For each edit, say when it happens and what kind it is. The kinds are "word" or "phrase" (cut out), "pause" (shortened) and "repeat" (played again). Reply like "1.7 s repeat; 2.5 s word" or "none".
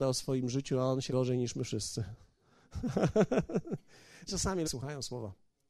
1.1 s word; 4.3 s word; 4.6 s phrase